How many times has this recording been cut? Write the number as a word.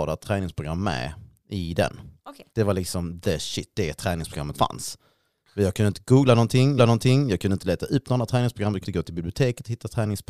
five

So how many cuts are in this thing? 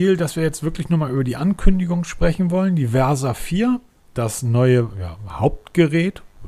one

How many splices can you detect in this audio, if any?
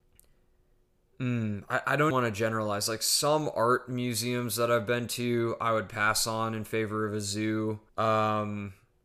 two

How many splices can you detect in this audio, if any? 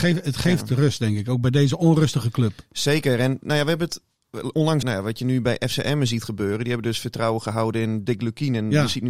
one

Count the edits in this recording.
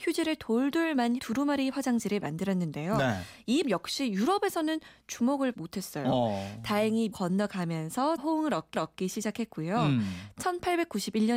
six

